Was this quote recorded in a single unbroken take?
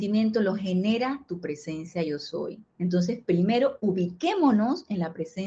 no; 1 cut; at 2.7 s

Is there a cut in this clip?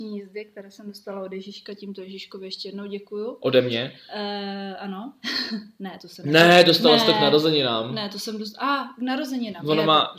yes; 1 cut; at 5.2 s

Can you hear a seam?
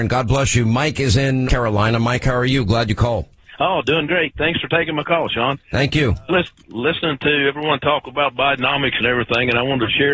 yes; 2 cuts; at 1.5 s, 6.3 s

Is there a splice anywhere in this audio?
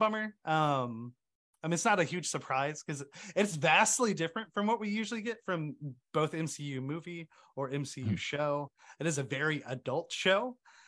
no; 0 cuts

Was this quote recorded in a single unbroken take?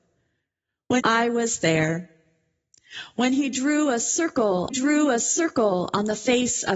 no; 2 cuts; at 1.0 s, 4.7 s

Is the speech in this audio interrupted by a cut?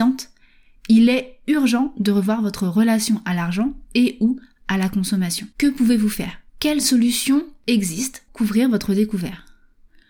yes; 3 cuts; at 5.5 s, 6.5 s, 8.3 s

